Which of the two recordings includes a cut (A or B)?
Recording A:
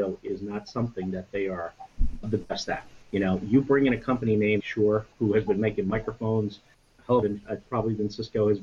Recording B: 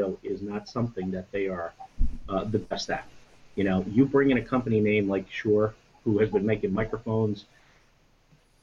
A